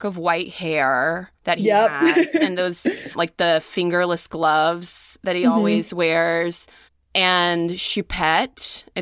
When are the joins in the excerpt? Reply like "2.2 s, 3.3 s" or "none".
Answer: 1.4 s, 6.9 s